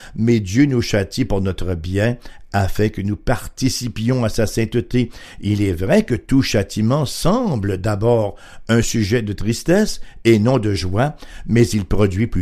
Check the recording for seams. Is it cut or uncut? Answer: uncut